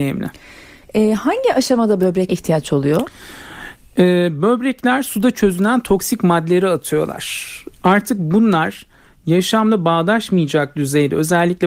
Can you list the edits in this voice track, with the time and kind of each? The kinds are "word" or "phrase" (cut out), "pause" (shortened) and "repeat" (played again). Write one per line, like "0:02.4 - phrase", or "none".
0:02.3 - word